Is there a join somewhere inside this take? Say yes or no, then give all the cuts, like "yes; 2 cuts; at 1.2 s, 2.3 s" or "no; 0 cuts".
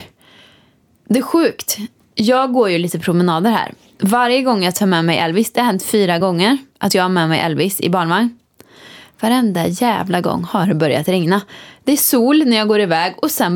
no; 0 cuts